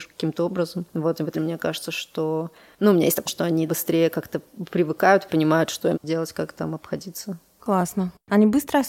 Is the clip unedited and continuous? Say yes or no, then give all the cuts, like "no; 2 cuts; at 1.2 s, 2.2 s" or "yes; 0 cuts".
no; 5 cuts; at 1.3 s, 3.3 s, 3.7 s, 5.3 s, 5.9 s